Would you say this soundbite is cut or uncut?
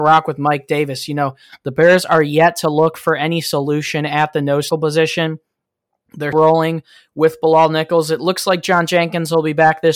cut